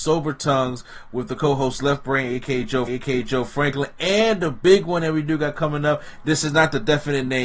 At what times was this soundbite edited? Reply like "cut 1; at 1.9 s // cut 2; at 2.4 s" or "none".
cut 1; at 2.9 s